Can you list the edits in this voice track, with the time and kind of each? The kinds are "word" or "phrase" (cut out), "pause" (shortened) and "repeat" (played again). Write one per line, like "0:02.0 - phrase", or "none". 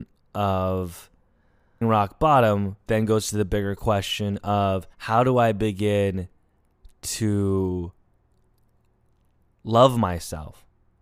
0:01.8 - phrase
0:02.9 - word
0:04.9 - pause